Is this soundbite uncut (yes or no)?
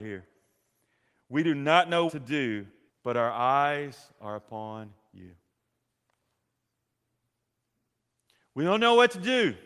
no